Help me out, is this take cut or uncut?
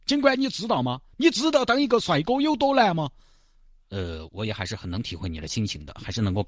uncut